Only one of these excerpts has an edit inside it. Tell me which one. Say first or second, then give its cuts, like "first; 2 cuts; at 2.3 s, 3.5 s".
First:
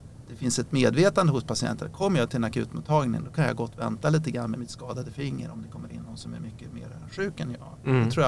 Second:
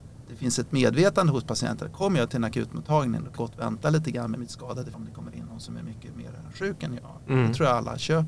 second; 2 cuts; at 3.4 s, 4.9 s